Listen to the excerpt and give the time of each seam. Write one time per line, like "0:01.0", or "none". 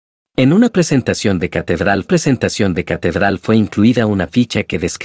0:02.0